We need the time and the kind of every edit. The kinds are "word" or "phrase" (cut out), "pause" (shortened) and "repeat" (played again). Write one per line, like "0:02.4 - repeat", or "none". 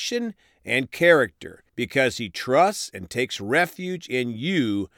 0:01.7 - pause